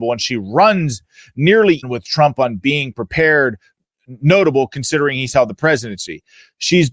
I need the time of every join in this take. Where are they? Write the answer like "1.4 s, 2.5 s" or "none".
1.8 s